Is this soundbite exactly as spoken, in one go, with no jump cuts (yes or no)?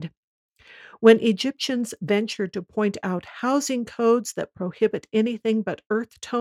yes